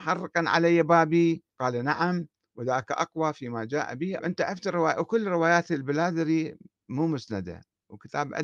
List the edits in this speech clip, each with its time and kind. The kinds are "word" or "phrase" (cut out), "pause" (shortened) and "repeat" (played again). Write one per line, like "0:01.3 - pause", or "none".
0:01.5 - pause
0:04.2 - phrase